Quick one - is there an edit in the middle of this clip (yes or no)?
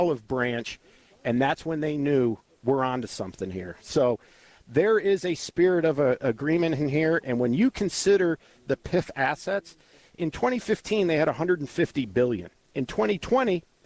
no